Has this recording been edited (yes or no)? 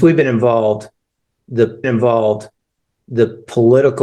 yes